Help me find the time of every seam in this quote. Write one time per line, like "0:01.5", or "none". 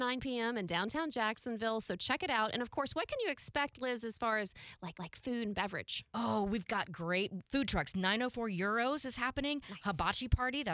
0:04.9
0:07.4